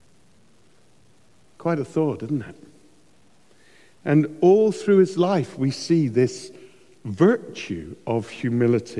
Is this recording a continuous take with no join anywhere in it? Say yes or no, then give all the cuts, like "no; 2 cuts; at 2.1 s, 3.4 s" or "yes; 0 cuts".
yes; 0 cuts